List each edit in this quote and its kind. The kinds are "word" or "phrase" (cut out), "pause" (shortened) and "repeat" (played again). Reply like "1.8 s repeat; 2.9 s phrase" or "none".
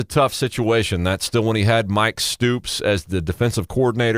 none